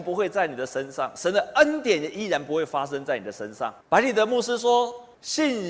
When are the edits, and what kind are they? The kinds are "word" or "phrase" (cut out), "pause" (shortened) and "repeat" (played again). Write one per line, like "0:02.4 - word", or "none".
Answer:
0:03.8 - pause